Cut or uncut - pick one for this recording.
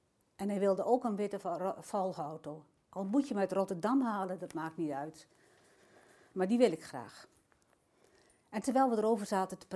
uncut